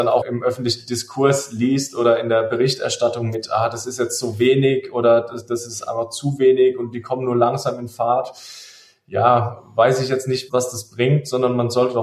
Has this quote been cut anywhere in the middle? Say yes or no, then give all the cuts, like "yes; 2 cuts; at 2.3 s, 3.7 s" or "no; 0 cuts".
no; 0 cuts